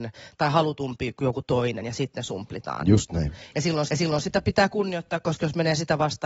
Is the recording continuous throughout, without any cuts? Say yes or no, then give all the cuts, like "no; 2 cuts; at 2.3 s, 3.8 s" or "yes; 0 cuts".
no; 1 cut; at 3.9 s